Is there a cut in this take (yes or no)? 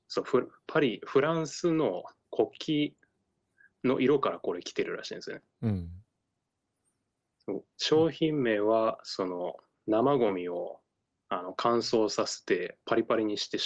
no